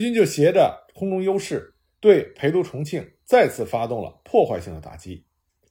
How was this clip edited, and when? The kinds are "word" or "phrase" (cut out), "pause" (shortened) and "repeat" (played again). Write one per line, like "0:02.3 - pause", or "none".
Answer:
0:01.9 - pause